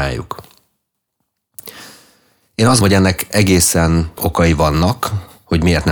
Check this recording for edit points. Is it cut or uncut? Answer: cut